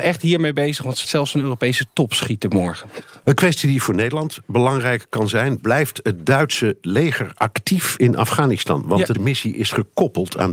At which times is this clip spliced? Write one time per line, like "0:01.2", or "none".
0:01.0
0:09.1